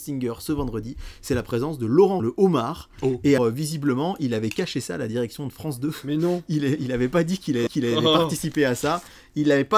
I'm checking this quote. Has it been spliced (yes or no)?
yes